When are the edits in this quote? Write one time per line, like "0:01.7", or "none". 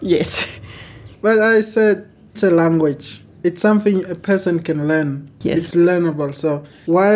0:02.3